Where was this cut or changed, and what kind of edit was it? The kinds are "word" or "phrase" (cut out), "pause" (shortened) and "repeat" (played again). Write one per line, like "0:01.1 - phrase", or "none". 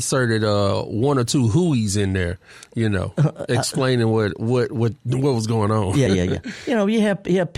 0:06.1 - word